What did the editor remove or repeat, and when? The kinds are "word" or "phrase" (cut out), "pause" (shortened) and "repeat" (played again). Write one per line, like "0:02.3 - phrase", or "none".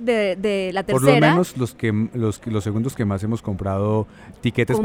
none